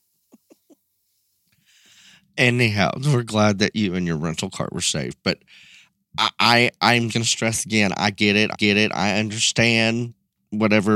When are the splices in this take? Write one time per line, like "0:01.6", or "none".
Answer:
0:07.1
0:08.5

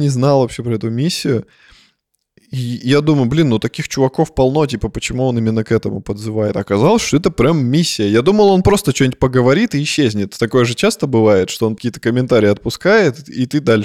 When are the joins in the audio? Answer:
0:11.8

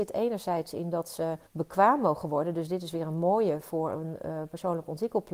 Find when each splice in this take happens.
0:01.5

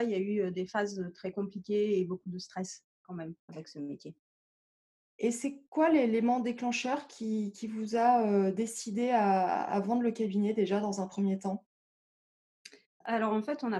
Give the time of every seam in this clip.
0:03.4

